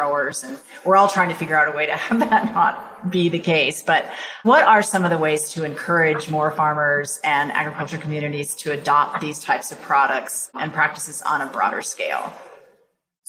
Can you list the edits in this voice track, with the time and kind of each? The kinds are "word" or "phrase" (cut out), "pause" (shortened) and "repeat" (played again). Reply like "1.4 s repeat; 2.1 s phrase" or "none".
4.4 s word